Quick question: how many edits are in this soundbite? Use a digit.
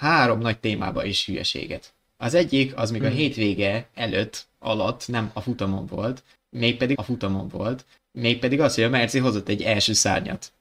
1